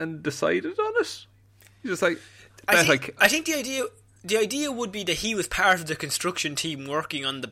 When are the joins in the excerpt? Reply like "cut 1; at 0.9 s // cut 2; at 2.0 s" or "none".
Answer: none